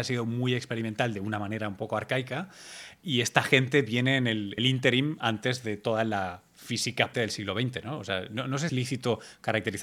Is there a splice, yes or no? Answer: yes